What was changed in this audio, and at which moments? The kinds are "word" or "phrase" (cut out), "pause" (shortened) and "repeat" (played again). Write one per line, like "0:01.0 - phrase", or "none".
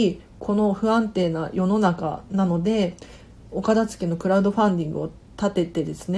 none